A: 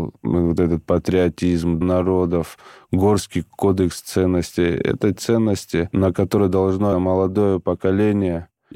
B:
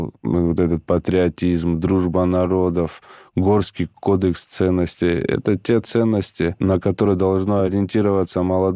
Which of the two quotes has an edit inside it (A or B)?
A